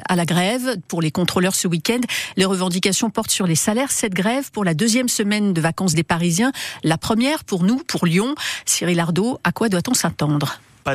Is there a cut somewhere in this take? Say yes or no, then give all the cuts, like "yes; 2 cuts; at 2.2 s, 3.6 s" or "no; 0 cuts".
no; 0 cuts